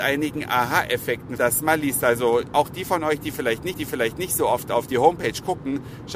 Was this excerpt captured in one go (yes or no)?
no